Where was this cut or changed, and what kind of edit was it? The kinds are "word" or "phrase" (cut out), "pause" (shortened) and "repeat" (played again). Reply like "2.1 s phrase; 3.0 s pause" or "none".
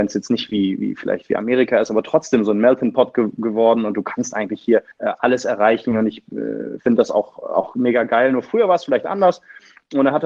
4.9 s pause